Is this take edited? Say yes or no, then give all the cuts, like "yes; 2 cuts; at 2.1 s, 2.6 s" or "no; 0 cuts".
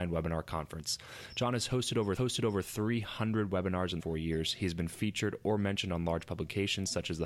yes; 2 cuts; at 2.2 s, 4.0 s